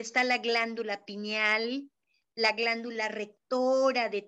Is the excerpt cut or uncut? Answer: uncut